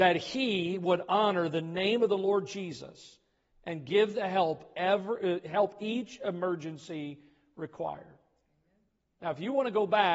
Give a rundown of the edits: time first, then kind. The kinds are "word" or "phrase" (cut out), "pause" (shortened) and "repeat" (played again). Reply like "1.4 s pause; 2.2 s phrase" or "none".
none